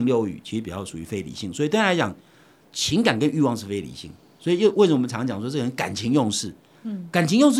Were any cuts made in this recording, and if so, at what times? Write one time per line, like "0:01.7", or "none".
none